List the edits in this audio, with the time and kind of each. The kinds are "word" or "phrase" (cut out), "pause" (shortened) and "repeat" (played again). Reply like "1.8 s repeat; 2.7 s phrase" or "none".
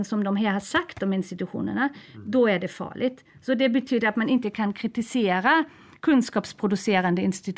none